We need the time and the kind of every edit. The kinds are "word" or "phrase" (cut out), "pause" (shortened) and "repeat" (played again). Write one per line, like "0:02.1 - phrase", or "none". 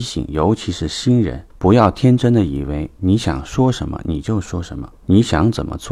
0:01.5 - pause
0:05.0 - pause